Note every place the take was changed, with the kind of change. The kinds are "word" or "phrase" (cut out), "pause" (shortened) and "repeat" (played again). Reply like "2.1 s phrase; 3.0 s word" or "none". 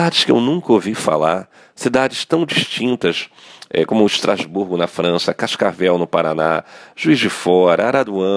none

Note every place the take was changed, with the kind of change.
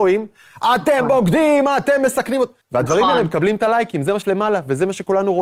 2.6 s pause; 4.2 s word

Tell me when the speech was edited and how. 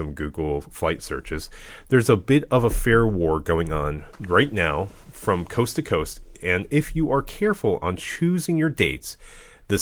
none

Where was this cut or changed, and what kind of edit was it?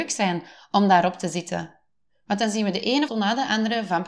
3.1 s word

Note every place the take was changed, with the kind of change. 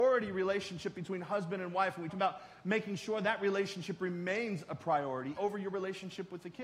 2.1 s word; 5.4 s word

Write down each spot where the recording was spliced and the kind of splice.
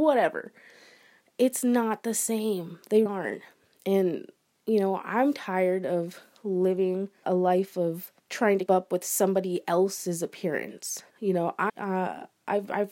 3.1 s word; 7.2 s word; 8.2 s pause; 8.7 s word; 11.1 s pause; 11.7 s word

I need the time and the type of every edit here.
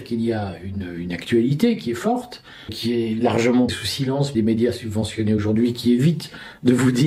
2.7 s word; 3.7 s word; 4.3 s phrase

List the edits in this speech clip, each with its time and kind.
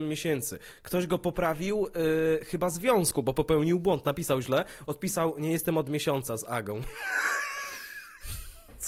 none

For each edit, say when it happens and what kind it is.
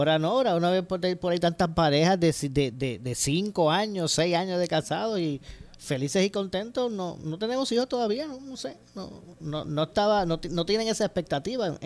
none

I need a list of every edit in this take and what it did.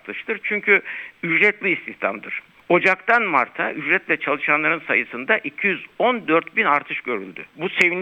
1.6 s phrase

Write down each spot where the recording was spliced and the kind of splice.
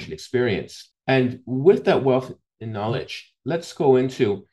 none

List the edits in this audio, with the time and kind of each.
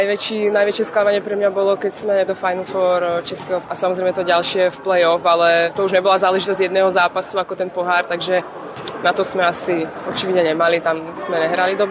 2.3 s word; 3.6 s word

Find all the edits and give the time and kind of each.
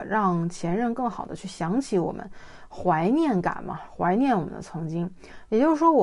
none

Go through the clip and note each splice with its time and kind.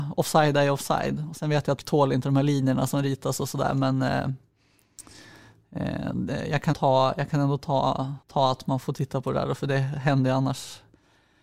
1.8 s word; 6.7 s word; 8.2 s pause; 8.8 s word

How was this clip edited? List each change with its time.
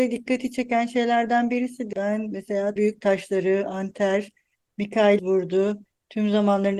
1.9 s word; 2.8 s word; 5.2 s word

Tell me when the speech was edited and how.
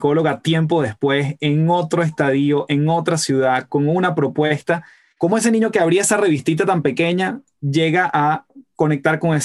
none

